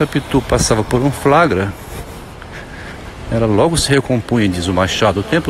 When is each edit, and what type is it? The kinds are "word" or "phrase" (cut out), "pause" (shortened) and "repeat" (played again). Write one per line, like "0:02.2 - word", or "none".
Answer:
none